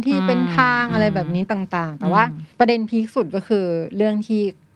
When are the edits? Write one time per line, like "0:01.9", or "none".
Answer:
0:02.5